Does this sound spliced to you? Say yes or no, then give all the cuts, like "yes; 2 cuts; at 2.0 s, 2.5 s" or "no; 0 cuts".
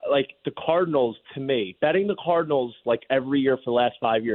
no; 0 cuts